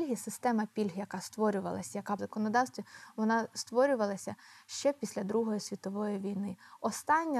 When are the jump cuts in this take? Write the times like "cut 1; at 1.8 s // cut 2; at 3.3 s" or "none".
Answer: cut 1; at 2.2 s